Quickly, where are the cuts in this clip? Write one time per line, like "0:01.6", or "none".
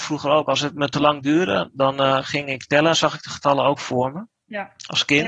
none